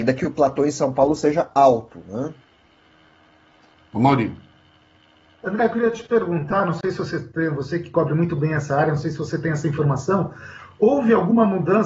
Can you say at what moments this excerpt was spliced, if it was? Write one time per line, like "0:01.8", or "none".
none